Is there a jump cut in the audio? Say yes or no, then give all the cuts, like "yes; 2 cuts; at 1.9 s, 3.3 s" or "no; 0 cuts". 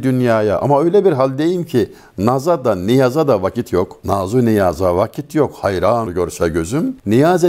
yes; 1 cut; at 6.1 s